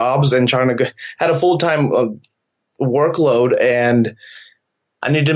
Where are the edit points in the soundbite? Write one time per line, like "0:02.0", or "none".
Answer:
none